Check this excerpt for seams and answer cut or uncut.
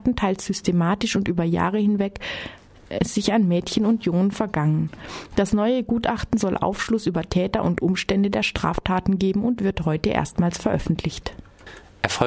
uncut